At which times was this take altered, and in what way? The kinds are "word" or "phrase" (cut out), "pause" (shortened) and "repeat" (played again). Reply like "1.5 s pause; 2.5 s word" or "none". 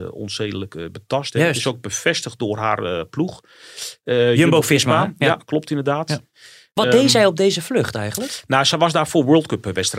none